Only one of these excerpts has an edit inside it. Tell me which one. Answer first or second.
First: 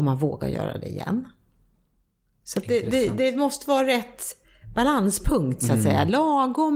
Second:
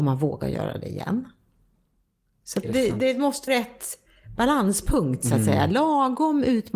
second